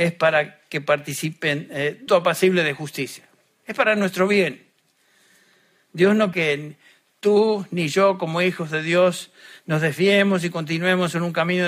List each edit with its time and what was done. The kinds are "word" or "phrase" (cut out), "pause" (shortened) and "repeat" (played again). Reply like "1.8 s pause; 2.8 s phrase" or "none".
2.1 s phrase; 6.3 s word